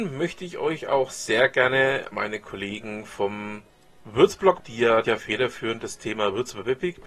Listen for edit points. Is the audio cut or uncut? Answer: cut